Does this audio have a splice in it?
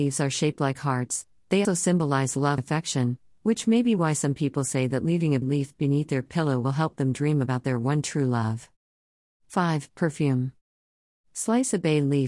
yes; 3 cuts; at 1.6 s, 2.6 s, 5.4 s

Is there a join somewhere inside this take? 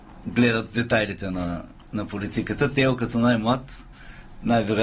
no; 0 cuts

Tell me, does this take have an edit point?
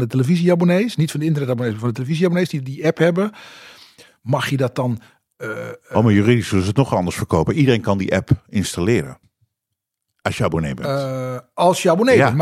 no; 0 cuts

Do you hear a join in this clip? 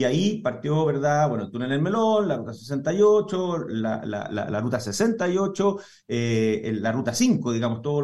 no; 0 cuts

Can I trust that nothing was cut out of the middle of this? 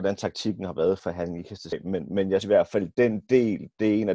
no; 3 cuts; at 1.0 s, 1.7 s, 2.4 s

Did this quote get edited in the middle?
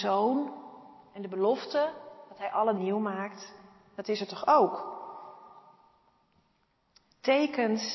yes; 1 cut; at 2.8 s

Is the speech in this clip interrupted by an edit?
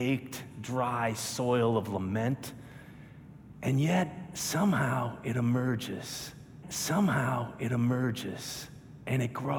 yes; 1 cut; at 6.6 s

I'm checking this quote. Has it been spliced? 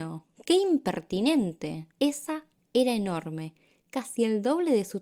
yes; 1 cut; at 1.9 s

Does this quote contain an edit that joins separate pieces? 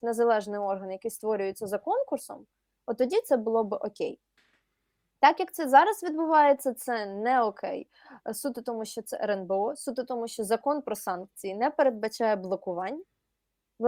no; 0 cuts

